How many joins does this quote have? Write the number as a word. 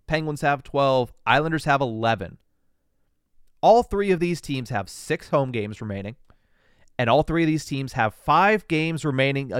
zero